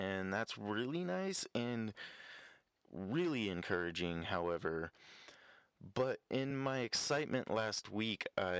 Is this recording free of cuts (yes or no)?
yes